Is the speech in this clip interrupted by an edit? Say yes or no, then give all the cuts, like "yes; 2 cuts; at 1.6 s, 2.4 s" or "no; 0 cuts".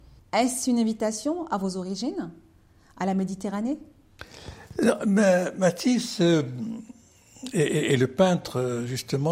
no; 0 cuts